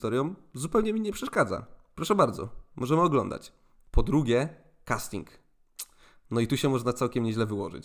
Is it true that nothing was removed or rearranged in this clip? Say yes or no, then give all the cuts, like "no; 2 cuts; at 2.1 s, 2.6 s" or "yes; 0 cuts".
yes; 0 cuts